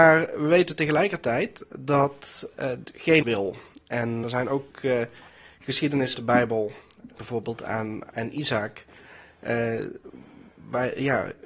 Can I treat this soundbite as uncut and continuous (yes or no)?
no